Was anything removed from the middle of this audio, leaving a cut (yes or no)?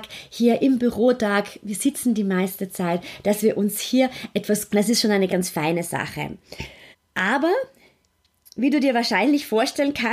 yes